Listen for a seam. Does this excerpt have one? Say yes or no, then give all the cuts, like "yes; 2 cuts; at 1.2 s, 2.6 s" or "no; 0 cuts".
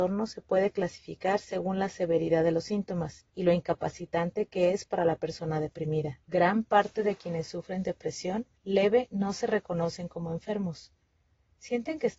yes; 3 cuts; at 3.3 s, 6.2 s, 8.6 s